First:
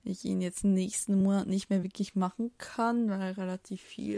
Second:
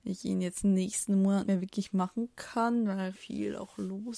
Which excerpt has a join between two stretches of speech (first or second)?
second